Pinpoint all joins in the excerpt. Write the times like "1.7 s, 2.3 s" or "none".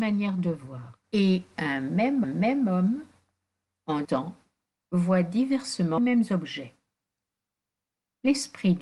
1.0 s, 2.2 s, 4.0 s, 6.0 s